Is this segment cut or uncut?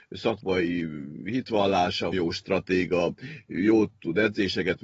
cut